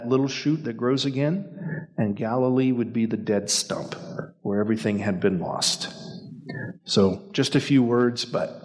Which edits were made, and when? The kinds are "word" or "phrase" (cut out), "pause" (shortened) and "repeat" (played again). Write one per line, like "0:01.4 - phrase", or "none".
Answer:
none